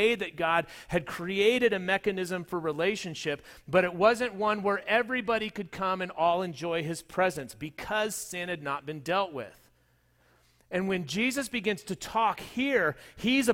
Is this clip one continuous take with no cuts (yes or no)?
yes